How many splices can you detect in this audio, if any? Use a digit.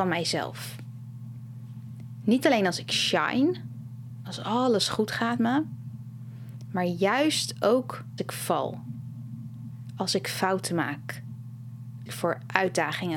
3